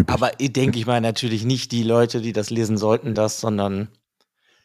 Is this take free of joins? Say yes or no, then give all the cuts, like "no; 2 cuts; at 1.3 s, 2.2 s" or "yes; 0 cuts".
no; 1 cut; at 3.1 s